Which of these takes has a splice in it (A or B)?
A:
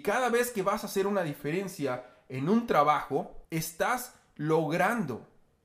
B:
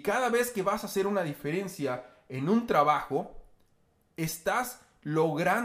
A